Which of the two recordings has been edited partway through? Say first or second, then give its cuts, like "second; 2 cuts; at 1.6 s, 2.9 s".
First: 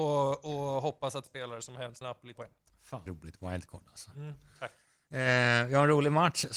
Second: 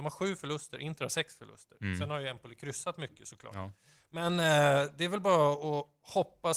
first; 4 cuts; at 1.3 s, 2.0 s, 2.4 s, 3.1 s